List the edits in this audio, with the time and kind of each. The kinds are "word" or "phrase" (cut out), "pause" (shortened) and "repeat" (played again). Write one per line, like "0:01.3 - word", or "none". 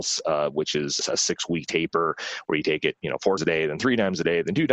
0:01.0 - word
0:03.4 - word